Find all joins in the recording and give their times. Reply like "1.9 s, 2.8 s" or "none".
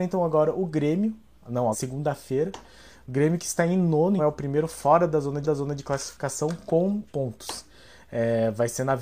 1.7 s, 4.2 s, 5.4 s, 7.1 s